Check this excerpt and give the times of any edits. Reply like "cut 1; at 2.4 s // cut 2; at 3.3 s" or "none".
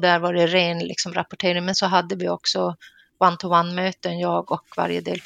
cut 1; at 1.7 s